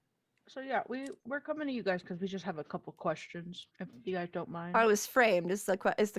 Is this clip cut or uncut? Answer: cut